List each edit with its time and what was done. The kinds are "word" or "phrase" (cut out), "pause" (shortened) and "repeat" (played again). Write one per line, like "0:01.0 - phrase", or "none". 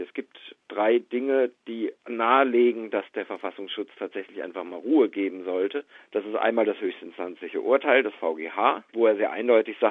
0:08.9 - pause